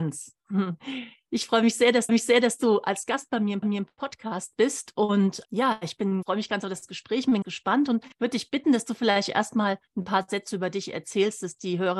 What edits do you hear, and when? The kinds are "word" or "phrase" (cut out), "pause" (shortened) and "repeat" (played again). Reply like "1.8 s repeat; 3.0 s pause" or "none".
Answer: 2.1 s repeat; 3.6 s repeat; 5.4 s word; 6.2 s word; 7.4 s word; 8.1 s pause